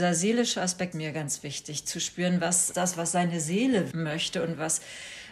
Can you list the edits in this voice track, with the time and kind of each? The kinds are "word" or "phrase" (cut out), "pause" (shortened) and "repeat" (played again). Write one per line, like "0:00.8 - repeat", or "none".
0:00.9 - word
0:02.7 - word
0:03.9 - word